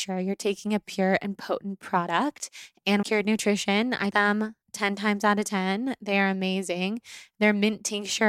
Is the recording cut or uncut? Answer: cut